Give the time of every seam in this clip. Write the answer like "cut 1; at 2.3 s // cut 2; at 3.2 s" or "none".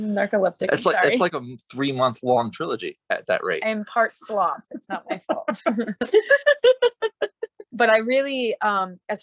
cut 1; at 1.3 s // cut 2; at 3.0 s // cut 3; at 7.7 s